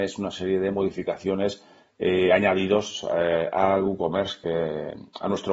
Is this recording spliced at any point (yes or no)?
no